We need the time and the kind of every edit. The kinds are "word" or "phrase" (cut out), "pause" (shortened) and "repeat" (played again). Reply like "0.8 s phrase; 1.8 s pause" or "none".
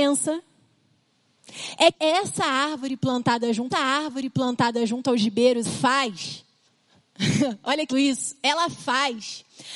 1.9 s word; 3.7 s repeat; 5.6 s word; 6.7 s pause; 7.9 s word